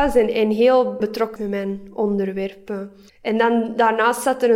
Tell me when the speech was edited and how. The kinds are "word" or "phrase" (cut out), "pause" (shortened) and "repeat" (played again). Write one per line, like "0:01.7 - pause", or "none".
0:01.0 - phrase
0:01.4 - word
0:03.1 - pause